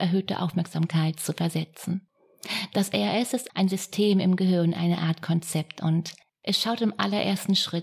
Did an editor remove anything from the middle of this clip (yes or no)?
yes